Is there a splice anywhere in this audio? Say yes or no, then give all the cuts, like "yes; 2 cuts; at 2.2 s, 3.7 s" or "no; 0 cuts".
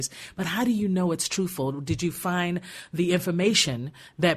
no; 0 cuts